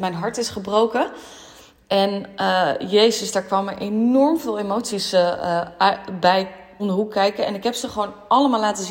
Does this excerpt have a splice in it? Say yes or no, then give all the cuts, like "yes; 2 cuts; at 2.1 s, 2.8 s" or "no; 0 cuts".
yes; 1 cut; at 6.8 s